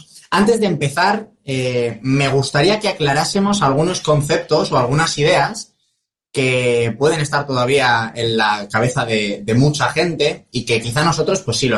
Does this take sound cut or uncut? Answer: uncut